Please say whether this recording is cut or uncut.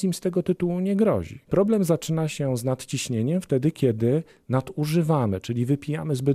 cut